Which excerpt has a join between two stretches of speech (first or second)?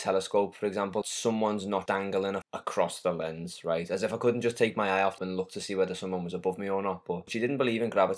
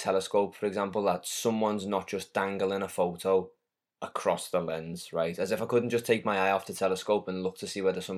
first